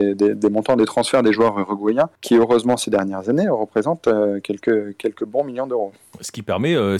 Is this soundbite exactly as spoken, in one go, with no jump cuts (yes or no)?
yes